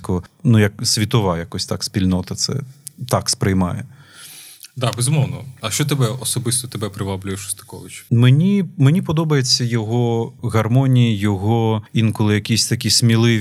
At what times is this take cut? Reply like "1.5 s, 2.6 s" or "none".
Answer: none